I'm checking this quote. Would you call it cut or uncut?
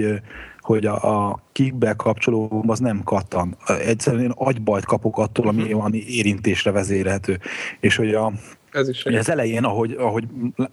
cut